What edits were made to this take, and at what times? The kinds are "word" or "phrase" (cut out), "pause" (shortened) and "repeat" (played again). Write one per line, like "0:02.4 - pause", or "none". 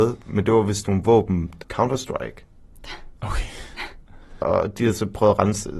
0:01.6 - phrase
0:03.1 - pause
0:04.4 - word